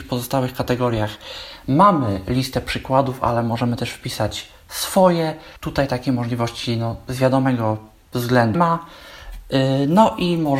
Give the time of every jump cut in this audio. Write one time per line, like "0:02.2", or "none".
0:05.6
0:08.5